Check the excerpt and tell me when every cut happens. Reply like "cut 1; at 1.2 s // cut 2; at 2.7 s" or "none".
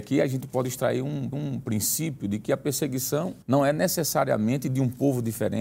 cut 1; at 1.3 s // cut 2; at 3.4 s